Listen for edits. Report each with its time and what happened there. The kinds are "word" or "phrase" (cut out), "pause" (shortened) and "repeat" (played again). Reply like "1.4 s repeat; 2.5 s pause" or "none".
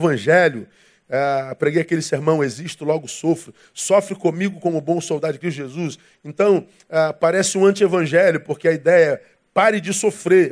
none